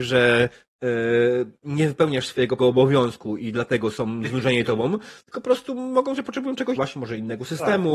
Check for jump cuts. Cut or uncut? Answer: cut